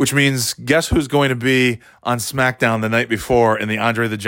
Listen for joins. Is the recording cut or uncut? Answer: uncut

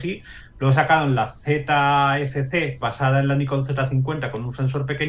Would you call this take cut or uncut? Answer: cut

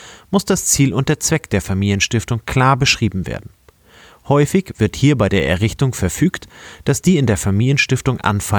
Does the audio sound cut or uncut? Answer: uncut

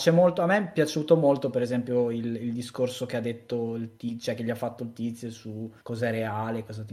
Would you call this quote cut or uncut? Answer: cut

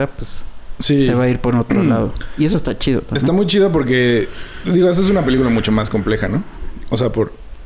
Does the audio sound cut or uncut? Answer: uncut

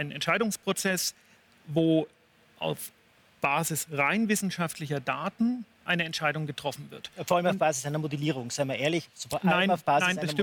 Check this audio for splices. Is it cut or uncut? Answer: uncut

